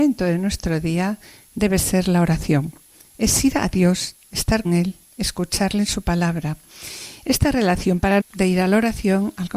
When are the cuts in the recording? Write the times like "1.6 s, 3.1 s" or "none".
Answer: 4.6 s, 8.2 s